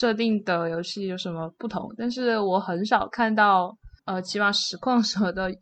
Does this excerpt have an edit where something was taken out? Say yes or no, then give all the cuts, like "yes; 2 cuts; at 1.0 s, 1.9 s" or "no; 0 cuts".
yes; 1 cut; at 4.0 s